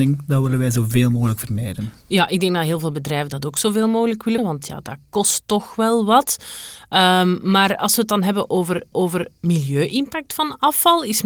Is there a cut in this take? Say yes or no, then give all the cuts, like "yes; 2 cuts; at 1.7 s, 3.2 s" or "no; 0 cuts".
yes; 2 cuts; at 4.4 s, 8.9 s